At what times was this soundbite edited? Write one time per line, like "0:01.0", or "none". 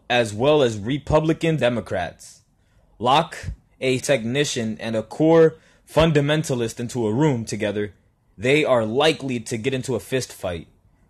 0:01.6
0:04.0

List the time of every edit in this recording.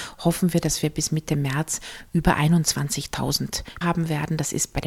0:03.8

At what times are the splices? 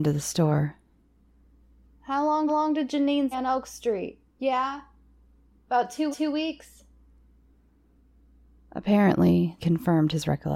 0:02.5
0:03.3
0:04.3
0:06.1
0:09.6

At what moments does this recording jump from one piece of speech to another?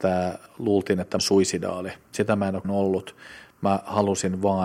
0:01.2
0:02.1
0:02.6

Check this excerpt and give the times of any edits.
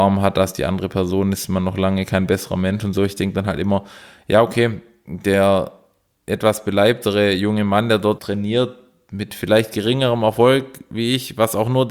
0:08.2

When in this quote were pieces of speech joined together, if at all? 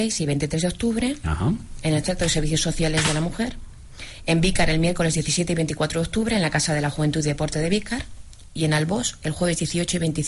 none

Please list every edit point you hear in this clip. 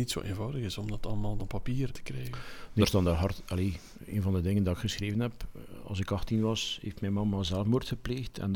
0:01.4
0:01.9
0:02.8

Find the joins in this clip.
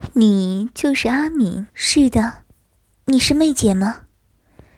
0:01.7

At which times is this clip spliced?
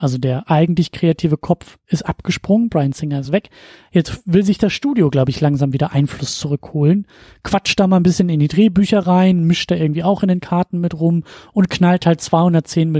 none

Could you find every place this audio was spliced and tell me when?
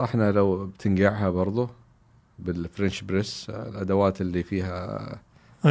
none

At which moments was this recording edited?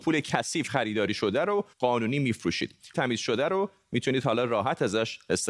0:01.7
0:02.9

